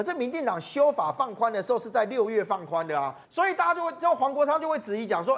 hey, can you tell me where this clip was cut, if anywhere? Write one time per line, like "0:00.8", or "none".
0:03.3